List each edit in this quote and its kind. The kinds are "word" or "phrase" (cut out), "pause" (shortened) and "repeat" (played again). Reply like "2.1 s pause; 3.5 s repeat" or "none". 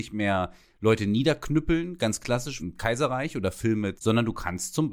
2.6 s word; 4.0 s word